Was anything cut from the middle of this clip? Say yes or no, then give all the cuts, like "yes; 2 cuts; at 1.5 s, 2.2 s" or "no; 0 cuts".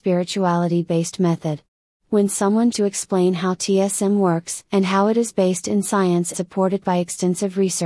yes; 3 cuts; at 2.7 s, 4.7 s, 6.3 s